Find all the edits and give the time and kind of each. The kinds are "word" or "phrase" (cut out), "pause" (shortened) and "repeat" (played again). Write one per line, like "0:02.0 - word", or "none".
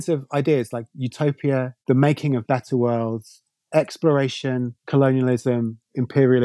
0:01.8 - pause
0:04.8 - pause